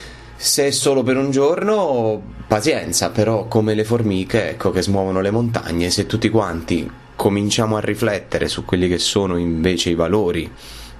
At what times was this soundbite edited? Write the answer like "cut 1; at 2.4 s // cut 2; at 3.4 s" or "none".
none